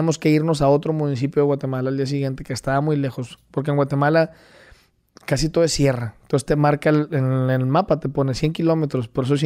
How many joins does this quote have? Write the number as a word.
zero